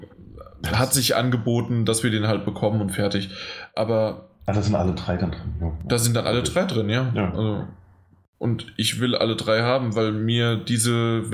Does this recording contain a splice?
no; 0 cuts

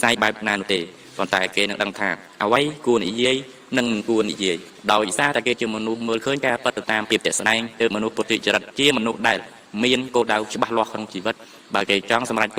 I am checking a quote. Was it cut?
no; 0 cuts

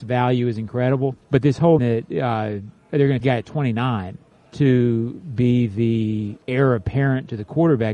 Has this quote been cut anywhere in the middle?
yes; 6 cuts; at 1.2 s, 1.8 s, 2.8 s, 3.2 s, 4.3 s, 6.4 s

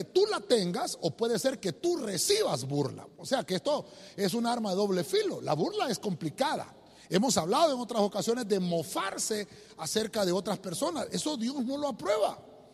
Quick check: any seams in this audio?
no; 0 cuts

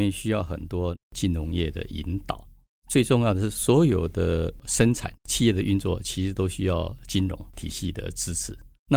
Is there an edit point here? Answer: no; 0 cuts

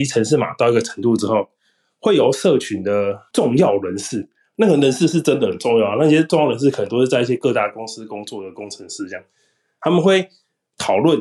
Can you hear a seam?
no; 0 cuts

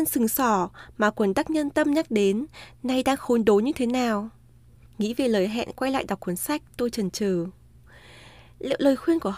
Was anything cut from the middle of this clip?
no; 0 cuts

